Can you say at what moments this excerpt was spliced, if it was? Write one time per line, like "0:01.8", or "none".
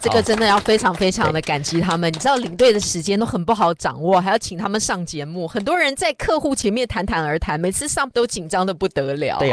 0:08.1